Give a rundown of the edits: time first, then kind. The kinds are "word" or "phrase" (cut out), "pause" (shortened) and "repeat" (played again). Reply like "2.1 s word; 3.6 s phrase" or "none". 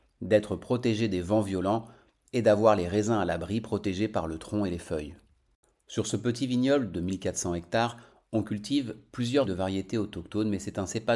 9.5 s word